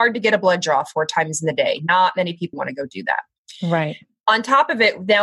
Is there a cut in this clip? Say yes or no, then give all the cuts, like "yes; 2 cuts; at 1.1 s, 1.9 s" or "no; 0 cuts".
yes; 1 cut; at 2.5 s